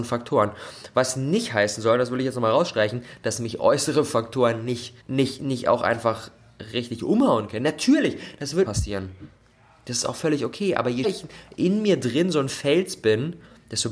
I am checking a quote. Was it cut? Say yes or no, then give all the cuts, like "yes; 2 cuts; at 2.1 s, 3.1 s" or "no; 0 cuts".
yes; 4 cuts; at 5.0 s, 6.7 s, 8.6 s, 11.0 s